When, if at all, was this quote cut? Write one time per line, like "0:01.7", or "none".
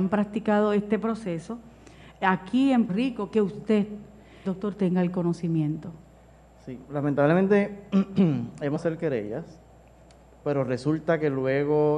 0:02.9
0:04.4
0:08.8